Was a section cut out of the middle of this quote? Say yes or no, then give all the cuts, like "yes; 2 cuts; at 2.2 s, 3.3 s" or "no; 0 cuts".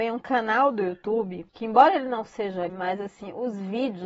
yes; 2 cuts; at 1.5 s, 2.7 s